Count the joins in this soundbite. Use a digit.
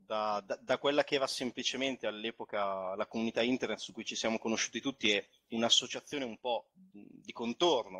0